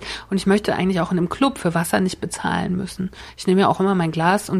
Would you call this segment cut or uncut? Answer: uncut